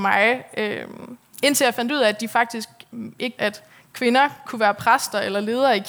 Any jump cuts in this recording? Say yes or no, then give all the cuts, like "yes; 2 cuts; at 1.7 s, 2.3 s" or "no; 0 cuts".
yes; 2 cuts; at 3.4 s, 3.7 s